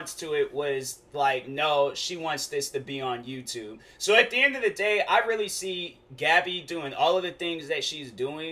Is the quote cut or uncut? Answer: uncut